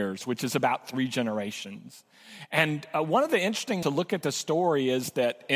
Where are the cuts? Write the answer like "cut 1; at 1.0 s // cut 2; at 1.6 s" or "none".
cut 1; at 3.8 s